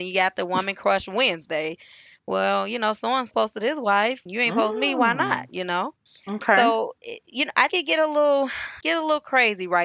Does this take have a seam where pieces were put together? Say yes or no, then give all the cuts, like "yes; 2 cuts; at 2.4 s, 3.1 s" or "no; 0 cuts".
yes; 4 cuts; at 3.3 s, 4.3 s, 7.7 s, 8.8 s